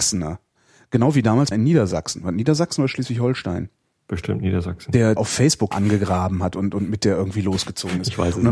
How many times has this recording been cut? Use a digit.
4